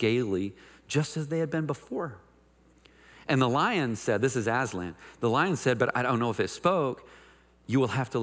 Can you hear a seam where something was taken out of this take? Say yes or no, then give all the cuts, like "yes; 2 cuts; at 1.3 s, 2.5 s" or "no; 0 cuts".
no; 0 cuts